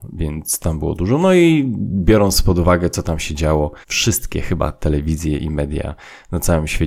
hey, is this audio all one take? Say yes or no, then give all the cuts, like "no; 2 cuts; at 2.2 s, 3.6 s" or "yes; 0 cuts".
no; 1 cut; at 3.8 s